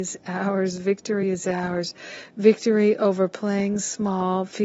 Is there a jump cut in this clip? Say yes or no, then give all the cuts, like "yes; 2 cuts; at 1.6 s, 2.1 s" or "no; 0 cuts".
no; 0 cuts